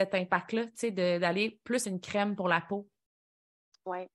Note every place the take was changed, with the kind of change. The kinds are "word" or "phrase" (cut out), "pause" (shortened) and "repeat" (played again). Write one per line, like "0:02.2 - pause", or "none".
0:01.8 - phrase